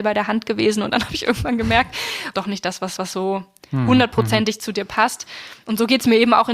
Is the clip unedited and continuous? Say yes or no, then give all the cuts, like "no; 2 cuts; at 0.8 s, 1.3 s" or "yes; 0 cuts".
no; 2 cuts; at 2.3 s, 3.0 s